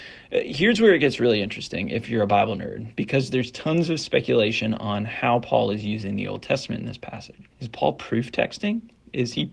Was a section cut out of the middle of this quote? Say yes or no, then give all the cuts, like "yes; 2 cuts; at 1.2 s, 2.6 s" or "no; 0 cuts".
yes; 1 cut; at 7.5 s